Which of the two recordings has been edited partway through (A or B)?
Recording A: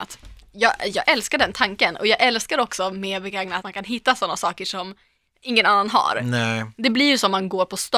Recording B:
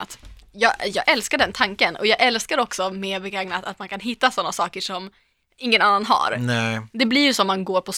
A